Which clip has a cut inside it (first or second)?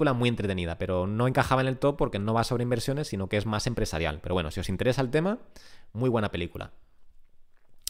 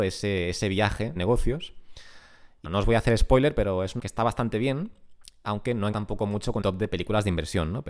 second